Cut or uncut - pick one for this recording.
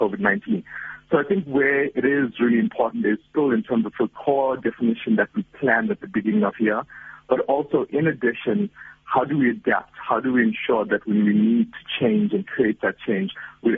uncut